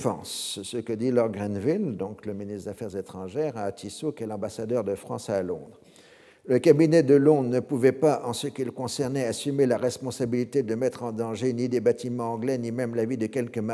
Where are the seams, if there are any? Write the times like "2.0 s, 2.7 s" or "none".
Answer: none